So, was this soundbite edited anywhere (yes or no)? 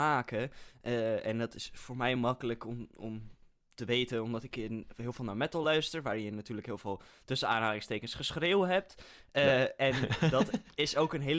no